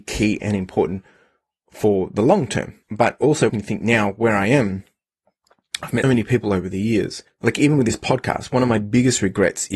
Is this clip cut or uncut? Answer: cut